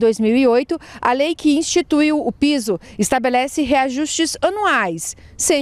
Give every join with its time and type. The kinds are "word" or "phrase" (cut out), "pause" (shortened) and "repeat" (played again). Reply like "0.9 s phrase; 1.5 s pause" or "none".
none